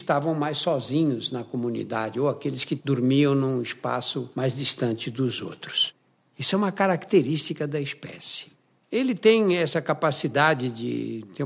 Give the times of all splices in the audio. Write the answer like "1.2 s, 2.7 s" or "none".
none

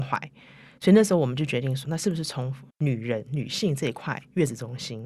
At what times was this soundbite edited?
1.8 s, 2.7 s

